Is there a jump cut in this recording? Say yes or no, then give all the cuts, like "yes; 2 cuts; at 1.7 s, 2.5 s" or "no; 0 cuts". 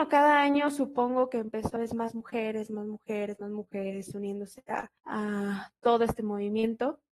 yes; 2 cuts; at 1.8 s, 5.0 s